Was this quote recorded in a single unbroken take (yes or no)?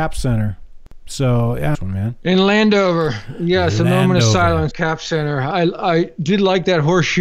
no